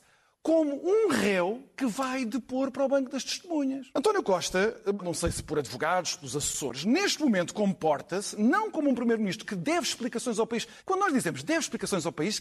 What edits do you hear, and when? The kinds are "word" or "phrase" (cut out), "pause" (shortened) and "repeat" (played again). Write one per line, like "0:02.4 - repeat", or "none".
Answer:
0:03.9 - pause
0:05.0 - word
0:10.8 - pause